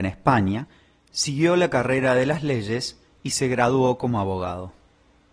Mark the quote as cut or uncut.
uncut